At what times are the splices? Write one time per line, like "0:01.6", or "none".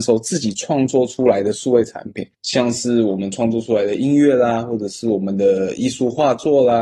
0:02.3